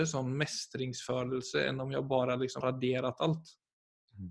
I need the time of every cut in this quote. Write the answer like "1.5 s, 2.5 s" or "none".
2.6 s